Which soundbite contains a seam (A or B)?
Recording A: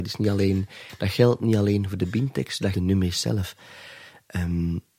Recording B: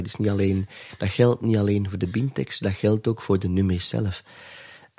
A